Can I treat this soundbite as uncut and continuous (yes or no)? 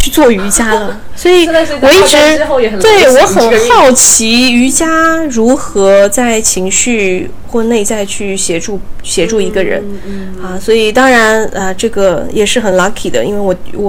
yes